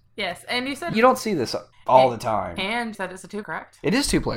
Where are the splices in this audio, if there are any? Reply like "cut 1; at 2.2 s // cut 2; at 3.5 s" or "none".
cut 1; at 0.9 s // cut 2; at 1.7 s // cut 3; at 2.9 s // cut 4; at 3.4 s